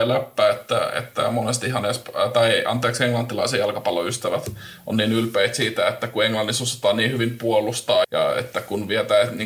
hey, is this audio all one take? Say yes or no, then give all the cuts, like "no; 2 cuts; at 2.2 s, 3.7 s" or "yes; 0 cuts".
no; 1 cut; at 8.0 s